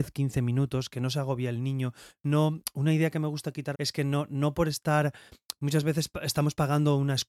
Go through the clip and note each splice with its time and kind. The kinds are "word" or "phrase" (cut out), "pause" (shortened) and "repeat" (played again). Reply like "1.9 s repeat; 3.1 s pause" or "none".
3.7 s phrase